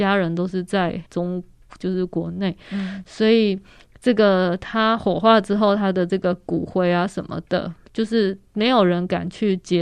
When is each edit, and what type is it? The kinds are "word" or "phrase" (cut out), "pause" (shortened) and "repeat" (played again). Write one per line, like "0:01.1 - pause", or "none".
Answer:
0:01.1 - pause

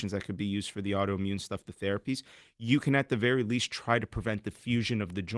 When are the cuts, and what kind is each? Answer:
none

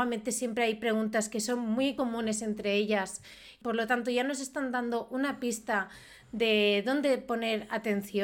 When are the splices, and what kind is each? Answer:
none

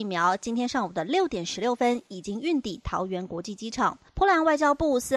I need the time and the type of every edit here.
0:04.1 - pause

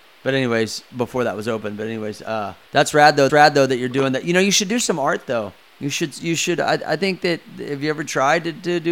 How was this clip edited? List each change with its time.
0:02.6 - pause
0:03.3 - repeat
0:05.6 - pause

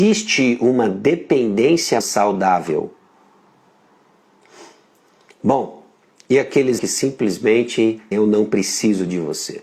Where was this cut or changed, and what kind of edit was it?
0:02.0 - word
0:06.8 - word
0:08.1 - word

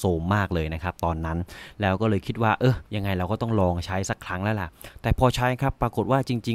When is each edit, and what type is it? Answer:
0:02.9 - pause

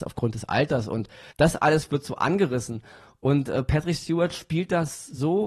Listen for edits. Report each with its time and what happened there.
none

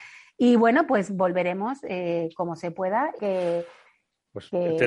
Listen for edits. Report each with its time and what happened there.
0:03.2 - phrase

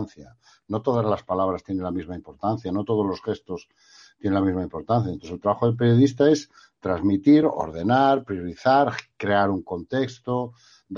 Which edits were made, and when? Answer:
none

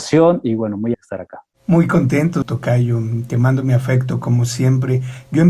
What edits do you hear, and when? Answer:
0:00.9 - word
0:01.5 - pause
0:02.4 - phrase

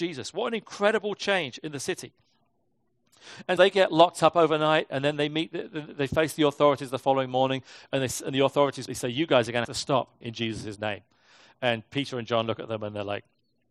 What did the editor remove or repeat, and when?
0:03.6 - word
0:08.9 - word
0:09.6 - word
0:10.2 - word

